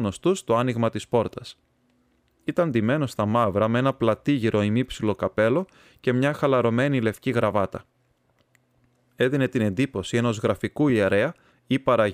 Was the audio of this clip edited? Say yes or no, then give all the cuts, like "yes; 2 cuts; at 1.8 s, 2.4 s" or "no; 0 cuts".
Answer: no; 0 cuts